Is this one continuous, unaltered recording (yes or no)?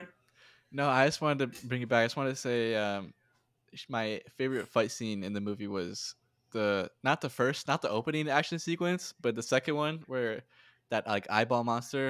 yes